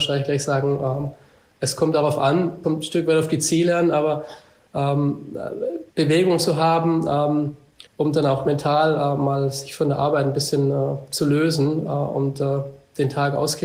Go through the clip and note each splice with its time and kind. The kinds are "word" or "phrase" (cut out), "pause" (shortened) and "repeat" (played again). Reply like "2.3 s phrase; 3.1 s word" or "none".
5.9 s pause; 7.9 s pause

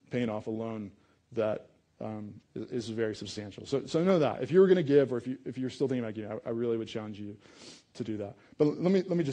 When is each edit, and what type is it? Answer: none

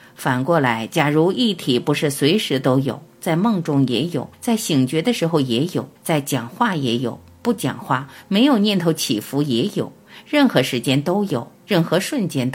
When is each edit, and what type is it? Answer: 4.3 s pause; 6.0 s pause

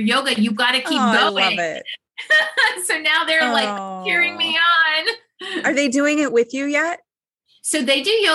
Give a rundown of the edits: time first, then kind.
none

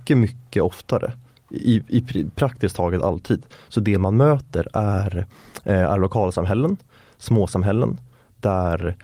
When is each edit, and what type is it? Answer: none

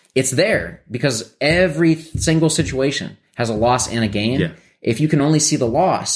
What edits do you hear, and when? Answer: none

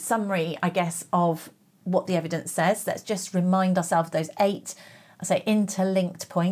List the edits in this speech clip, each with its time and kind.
none

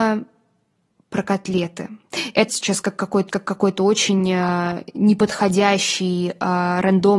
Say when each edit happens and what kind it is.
2.5 s word; 3.3 s repeat

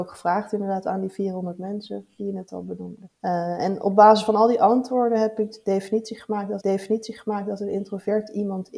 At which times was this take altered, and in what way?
3.1 s pause; 6.6 s repeat

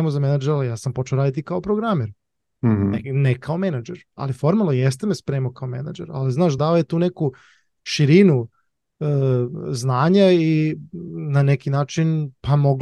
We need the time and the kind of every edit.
none

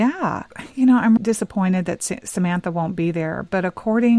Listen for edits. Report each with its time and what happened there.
1.2 s word

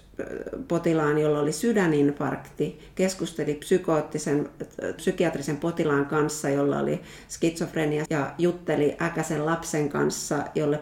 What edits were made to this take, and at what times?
5.0 s word; 8.1 s word

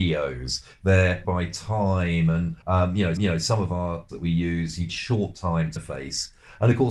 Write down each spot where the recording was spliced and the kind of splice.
1.2 s word; 2.6 s pause; 3.2 s repeat; 4.1 s word; 4.9 s phrase; 5.8 s word

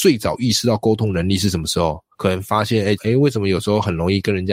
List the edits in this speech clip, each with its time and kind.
2.1 s pause; 3.0 s phrase

